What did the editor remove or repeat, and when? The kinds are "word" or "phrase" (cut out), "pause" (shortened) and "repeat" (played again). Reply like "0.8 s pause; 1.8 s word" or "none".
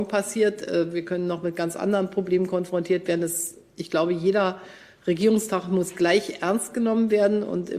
none

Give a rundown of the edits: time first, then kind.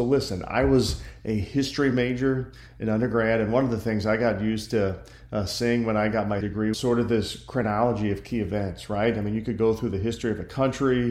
6.4 s word; 6.7 s word

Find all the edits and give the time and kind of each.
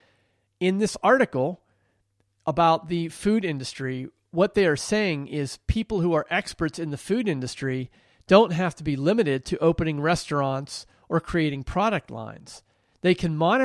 none

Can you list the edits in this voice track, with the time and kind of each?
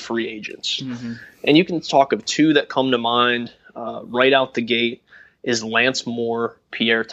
none

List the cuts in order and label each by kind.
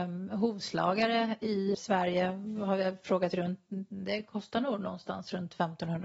1.7 s word

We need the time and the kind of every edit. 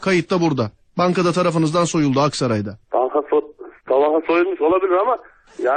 2.8 s pause; 3.8 s pause

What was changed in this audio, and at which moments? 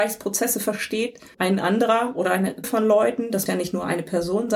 1.3 s word; 2.6 s word; 3.5 s word

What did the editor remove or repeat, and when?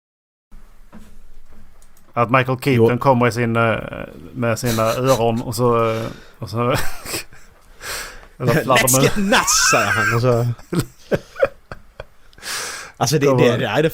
none

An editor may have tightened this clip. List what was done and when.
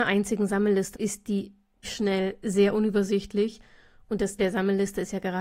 0.9 s word; 1.8 s word; 4.4 s word

